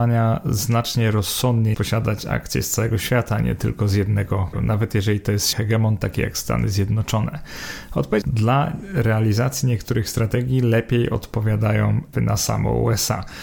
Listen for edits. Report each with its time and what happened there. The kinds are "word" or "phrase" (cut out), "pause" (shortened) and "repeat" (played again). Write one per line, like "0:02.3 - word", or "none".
0:01.7 - word
0:04.5 - word
0:05.5 - word
0:08.2 - phrase
0:12.1 - word